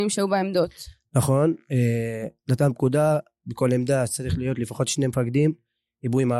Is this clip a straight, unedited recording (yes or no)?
no